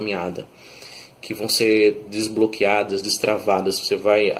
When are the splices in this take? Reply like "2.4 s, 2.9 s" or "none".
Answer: none

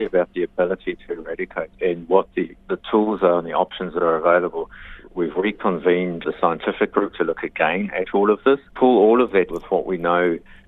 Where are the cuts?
1.7 s, 6.2 s, 8.7 s, 9.5 s

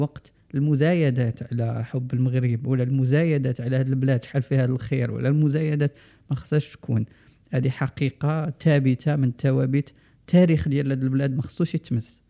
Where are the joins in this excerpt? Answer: none

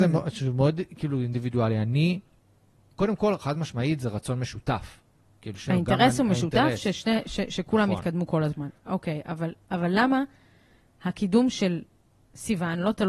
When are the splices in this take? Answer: none

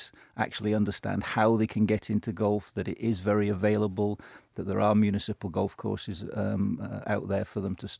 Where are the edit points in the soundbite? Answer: none

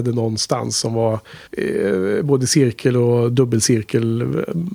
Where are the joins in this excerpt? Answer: 1.5 s

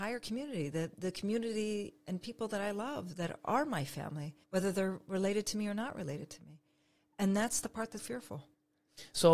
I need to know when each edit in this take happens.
4.4 s, 8.0 s

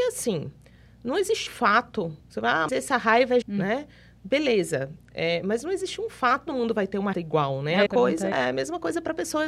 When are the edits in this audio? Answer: 1.5 s, 2.2 s, 2.7 s, 3.4 s, 6.5 s, 7.1 s, 7.9 s, 8.3 s

